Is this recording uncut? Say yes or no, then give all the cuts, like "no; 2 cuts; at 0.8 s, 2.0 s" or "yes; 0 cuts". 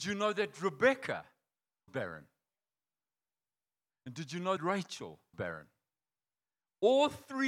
no; 3 cuts; at 1.9 s, 4.6 s, 5.3 s